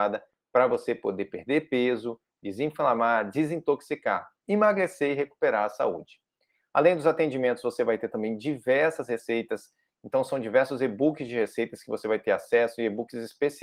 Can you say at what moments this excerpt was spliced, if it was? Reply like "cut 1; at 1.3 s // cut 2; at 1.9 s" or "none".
none